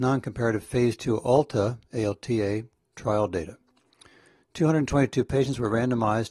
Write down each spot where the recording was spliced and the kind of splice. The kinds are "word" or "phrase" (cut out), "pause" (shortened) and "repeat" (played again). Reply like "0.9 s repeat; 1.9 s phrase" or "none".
none

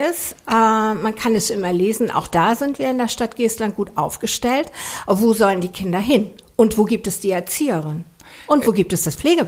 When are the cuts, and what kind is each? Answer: none

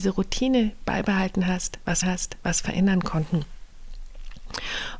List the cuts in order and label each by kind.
2.0 s repeat

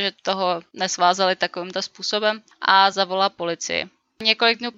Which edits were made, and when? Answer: none

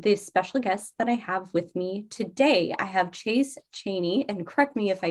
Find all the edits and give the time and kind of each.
none

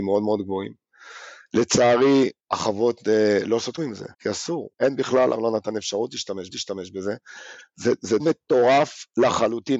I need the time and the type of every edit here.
2.4 s pause; 3.8 s word; 4.1 s pause; 4.7 s pause; 5.3 s word; 6.5 s repeat; 8.2 s word

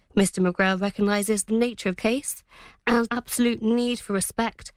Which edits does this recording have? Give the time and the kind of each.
1.5 s word; 2.0 s word; 3.1 s word

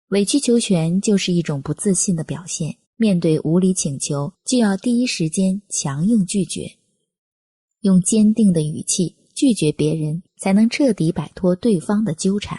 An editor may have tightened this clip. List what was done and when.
2.8 s pause

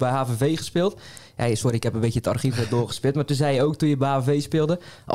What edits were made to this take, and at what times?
none

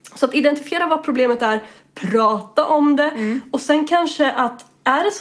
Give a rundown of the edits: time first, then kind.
none

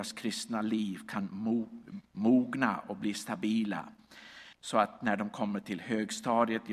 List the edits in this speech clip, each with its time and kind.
4.5 s pause

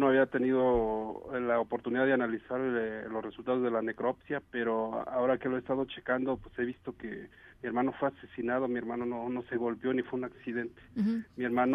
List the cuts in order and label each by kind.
4.5 s pause

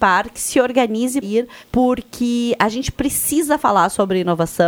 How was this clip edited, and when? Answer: 1.2 s word; 1.6 s pause

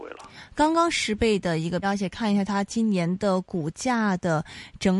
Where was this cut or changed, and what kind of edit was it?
1.8 s word

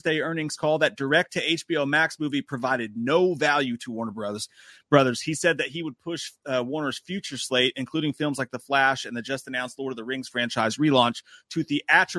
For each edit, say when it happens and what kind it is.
none

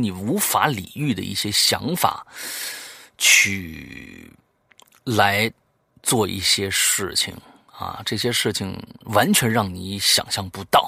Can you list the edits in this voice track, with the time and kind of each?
none

